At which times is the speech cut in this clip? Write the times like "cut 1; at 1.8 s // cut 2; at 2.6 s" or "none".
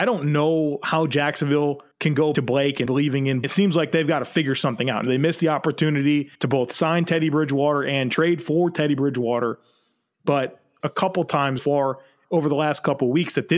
cut 1; at 1.9 s // cut 2; at 2.3 s // cut 3; at 2.9 s // cut 4; at 3.4 s // cut 5; at 5.1 s // cut 6; at 6.3 s // cut 7; at 10.8 s // cut 8; at 11.6 s